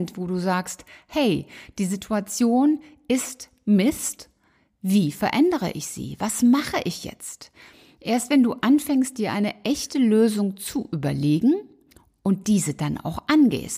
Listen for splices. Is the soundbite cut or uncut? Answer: uncut